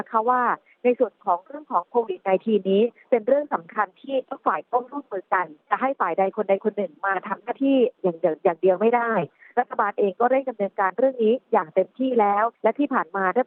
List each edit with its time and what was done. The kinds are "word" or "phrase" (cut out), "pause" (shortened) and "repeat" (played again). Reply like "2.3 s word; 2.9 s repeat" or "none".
5.6 s pause; 12.6 s pause